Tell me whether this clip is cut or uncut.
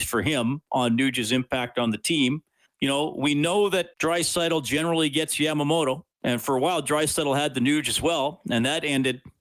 cut